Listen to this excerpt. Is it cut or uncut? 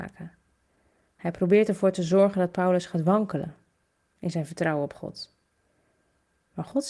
uncut